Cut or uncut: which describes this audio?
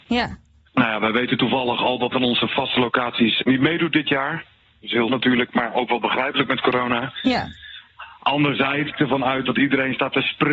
cut